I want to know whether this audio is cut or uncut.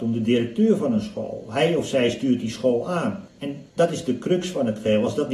uncut